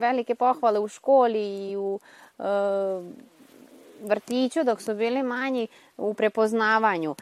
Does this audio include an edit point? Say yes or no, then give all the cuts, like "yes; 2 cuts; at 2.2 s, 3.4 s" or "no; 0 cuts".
no; 0 cuts